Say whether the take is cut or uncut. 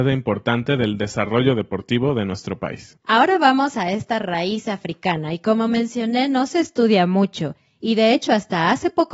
uncut